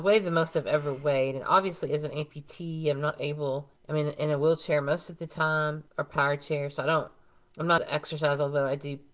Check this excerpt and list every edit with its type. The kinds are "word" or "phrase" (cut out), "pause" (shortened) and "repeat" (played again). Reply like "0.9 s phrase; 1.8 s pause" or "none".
3.8 s pause; 5.9 s pause; 7.8 s word

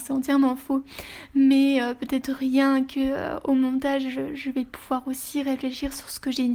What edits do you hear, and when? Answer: none

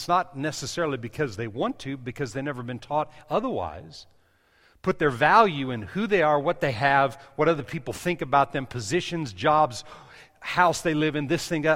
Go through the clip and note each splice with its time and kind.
none

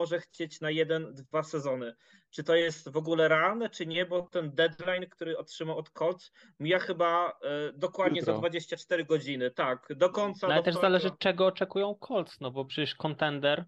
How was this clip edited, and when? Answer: none

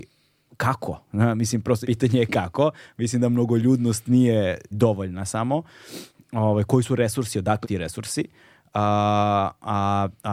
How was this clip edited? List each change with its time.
1.0 s pause; 1.8 s word; 4.7 s word; 7.6 s word

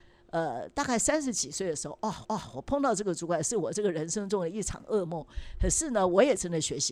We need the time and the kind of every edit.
2.2 s repeat

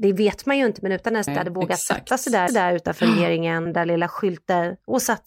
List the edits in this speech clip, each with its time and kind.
1.3 s phrase; 2.5 s repeat; 3.7 s word

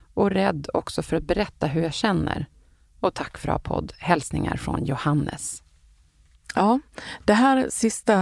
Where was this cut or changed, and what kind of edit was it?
3.4 s word

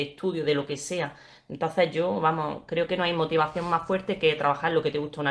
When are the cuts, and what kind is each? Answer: none

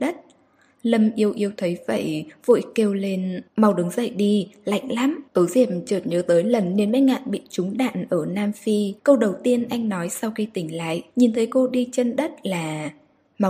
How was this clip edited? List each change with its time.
3.5 s pause; 5.3 s pause; 9.0 s pause; 11.1 s pause

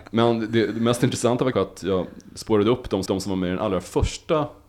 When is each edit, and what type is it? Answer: 1.5 s word; 3.1 s repeat

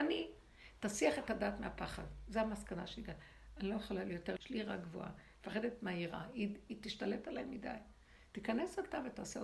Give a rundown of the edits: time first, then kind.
4.4 s phrase

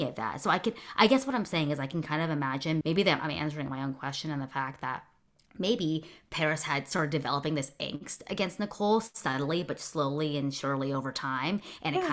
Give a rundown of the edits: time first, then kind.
2.8 s word

